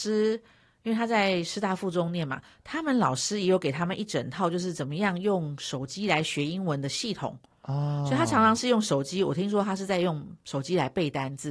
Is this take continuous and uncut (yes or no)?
yes